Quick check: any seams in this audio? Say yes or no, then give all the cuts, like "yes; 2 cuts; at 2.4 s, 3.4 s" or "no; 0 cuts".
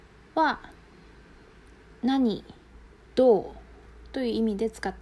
yes; 1 cut; at 3.1 s